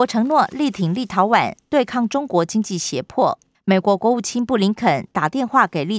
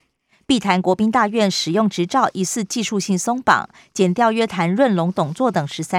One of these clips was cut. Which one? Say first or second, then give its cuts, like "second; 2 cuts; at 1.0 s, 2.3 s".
first; 1 cut; at 3.5 s